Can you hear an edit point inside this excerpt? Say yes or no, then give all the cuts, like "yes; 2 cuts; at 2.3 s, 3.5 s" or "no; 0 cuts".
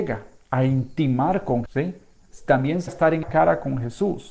yes; 3 cuts; at 1.7 s, 2.9 s, 3.2 s